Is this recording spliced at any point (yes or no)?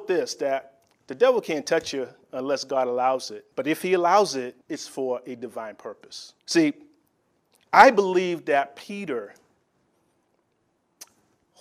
yes